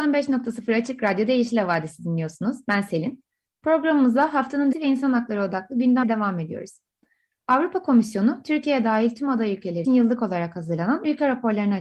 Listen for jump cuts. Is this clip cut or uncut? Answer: cut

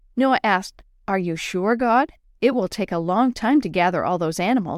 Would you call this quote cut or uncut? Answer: uncut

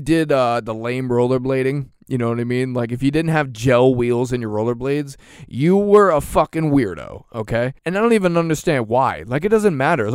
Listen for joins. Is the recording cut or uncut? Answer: cut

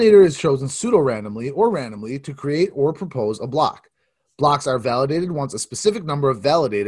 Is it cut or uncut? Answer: uncut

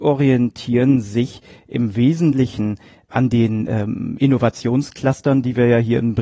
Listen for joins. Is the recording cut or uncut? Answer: uncut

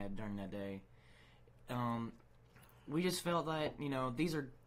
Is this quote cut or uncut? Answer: uncut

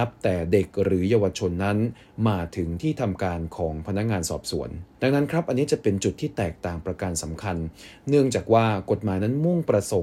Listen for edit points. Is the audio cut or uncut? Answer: cut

